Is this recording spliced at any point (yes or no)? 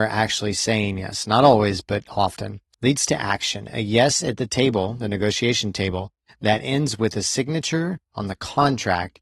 no